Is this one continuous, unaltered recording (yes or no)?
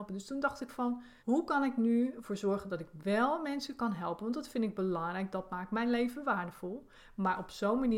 no